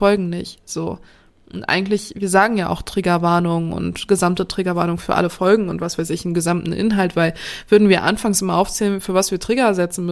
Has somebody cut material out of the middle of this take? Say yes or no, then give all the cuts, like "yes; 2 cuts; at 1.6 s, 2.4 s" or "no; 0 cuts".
no; 0 cuts